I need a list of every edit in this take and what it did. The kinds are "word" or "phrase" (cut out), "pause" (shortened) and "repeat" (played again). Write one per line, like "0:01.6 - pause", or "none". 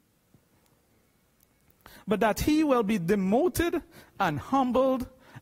none